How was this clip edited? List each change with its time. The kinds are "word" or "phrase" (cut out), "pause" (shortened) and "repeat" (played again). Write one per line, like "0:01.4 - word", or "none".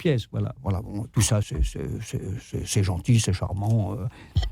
0:01.1 - word
0:01.4 - word